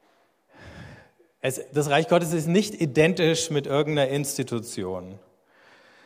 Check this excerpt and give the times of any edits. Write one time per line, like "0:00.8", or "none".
none